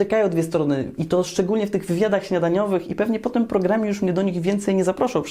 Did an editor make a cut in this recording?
no; 0 cuts

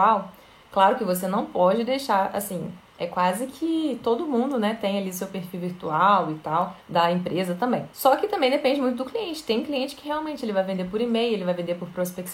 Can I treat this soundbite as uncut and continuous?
no; 3 cuts; at 2.9 s, 6.8 s, 7.9 s

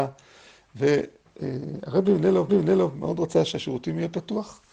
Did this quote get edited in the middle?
yes; 1 cut; at 2.5 s

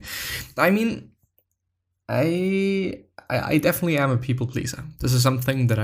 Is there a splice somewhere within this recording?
no; 0 cuts

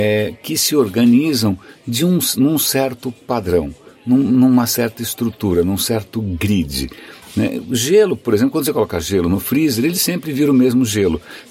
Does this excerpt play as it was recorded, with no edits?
yes; 0 cuts

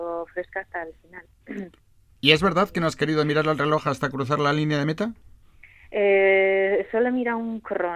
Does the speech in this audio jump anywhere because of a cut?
no; 0 cuts

